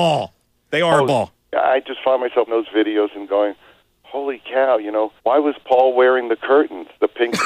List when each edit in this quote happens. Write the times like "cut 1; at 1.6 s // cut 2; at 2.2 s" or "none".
cut 1; at 2.5 s // cut 2; at 5.2 s